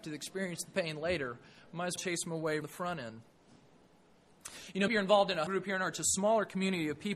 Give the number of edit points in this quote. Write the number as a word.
five